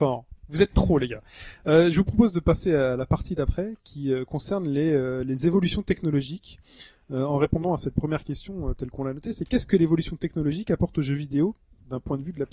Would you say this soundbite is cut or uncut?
uncut